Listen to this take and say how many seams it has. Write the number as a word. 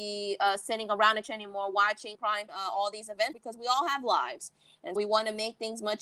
five